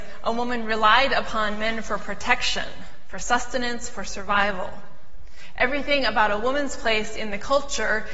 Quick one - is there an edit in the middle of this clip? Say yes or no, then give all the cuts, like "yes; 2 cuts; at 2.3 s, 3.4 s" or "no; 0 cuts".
no; 0 cuts